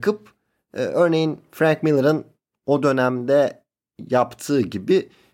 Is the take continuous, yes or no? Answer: yes